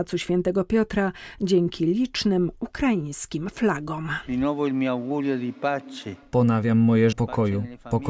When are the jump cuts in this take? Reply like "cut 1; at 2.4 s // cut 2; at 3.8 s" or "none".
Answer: cut 1; at 7.1 s